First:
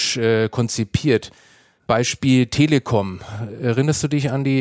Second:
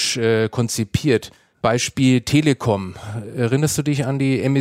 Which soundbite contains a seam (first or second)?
second